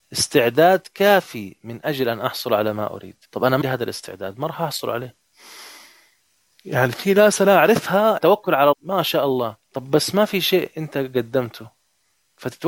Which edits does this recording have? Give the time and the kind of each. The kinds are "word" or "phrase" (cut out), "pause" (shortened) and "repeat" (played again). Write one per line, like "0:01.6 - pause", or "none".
0:03.2 - pause
0:03.6 - word
0:06.4 - pause
0:08.2 - word
0:08.7 - word
0:09.6 - pause